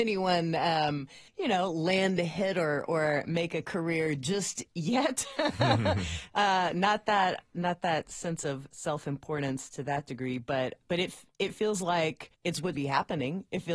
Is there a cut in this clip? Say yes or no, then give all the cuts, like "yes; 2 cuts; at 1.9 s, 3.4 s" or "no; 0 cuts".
yes; 4 cuts; at 1.3 s, 10.8 s, 12.3 s, 12.7 s